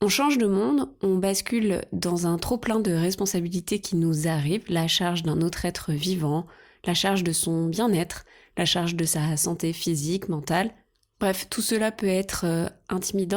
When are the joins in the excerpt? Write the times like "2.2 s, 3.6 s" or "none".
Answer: none